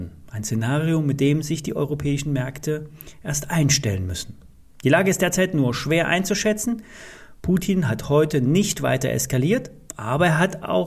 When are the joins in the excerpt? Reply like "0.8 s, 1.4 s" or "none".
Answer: none